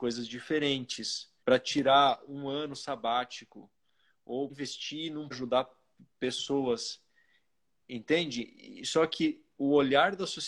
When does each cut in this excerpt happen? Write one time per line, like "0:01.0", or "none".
0:01.4
0:04.5
0:05.3

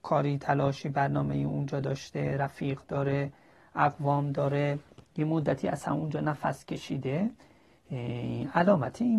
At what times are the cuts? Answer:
none

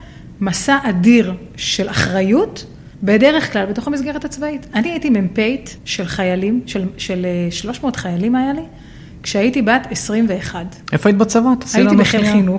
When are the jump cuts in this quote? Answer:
0:02.9
0:05.8
0:10.8

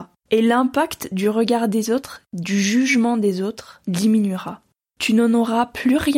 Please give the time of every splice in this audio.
none

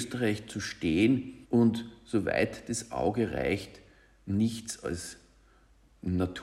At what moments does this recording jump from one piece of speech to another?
0:01.4

